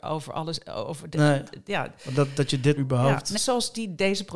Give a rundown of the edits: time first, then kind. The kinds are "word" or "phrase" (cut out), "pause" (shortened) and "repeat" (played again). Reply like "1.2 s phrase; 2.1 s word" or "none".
2.8 s word; 3.4 s word